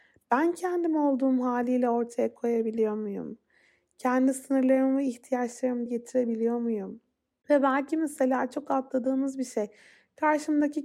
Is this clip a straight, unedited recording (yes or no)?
no